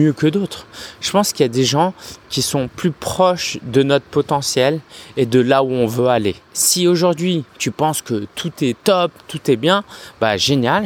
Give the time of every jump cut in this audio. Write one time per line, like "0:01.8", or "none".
0:06.4
0:07.5